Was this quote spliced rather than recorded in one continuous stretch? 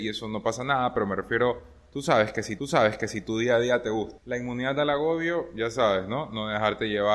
yes; 1 cut; at 2.6 s

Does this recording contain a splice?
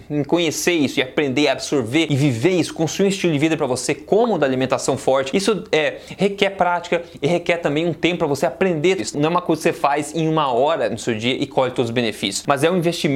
yes; 1 cut; at 9.0 s

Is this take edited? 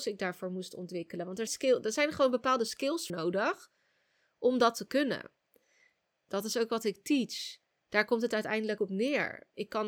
yes; 3 cuts; at 1.5 s, 3.1 s, 8.8 s

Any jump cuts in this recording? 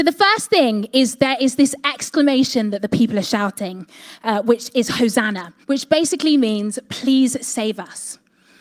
yes; 1 cut; at 5.6 s

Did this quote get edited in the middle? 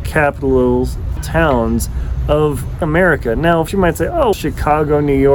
yes; 4 cuts; at 1.2 s, 2.8 s, 3.7 s, 4.3 s

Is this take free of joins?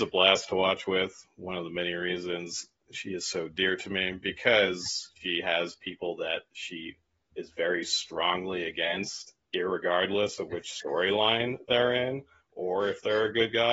yes; 0 cuts

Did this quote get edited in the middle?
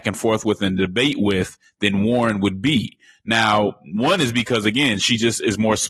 no; 0 cuts

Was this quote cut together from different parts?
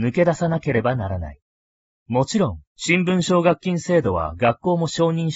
yes; 2 cuts; at 1.6 s, 2.7 s

